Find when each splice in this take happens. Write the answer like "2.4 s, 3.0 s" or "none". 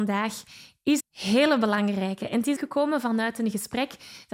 1.0 s, 2.6 s